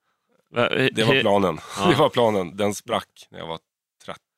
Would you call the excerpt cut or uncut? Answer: uncut